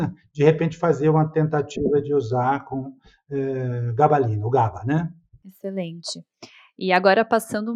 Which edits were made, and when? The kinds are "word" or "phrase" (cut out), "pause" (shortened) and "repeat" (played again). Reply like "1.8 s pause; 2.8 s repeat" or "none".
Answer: none